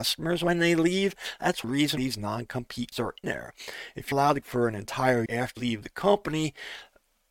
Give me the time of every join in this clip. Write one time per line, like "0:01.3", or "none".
0:01.6
0:02.0
0:02.9
0:03.2
0:04.1
0:04.4
0:05.3
0:05.6